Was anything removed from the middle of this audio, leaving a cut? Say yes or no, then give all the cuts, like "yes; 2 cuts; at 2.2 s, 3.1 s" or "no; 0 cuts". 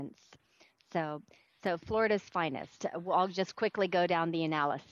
no; 0 cuts